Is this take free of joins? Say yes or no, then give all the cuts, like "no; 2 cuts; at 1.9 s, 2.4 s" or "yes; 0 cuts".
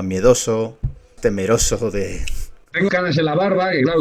no; 2 cuts; at 1.2 s, 2.9 s